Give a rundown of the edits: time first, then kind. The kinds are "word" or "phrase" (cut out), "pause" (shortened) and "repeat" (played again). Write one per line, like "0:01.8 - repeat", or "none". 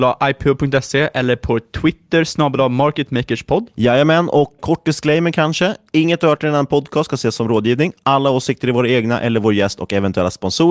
0:04.6 - word